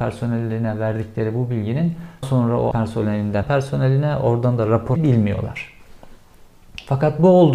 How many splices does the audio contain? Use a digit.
4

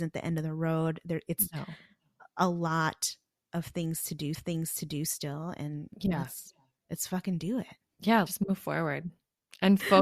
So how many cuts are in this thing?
3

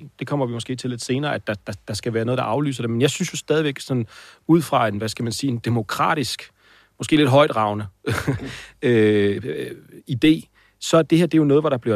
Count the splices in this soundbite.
0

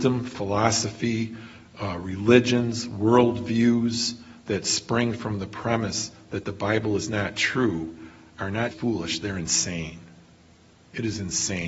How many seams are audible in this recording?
1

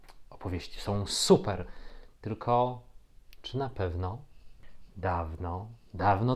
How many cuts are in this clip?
0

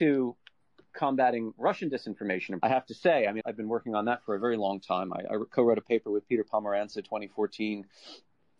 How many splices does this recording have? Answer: 3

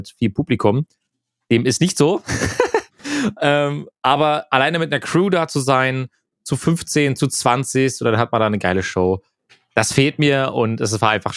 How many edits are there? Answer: 0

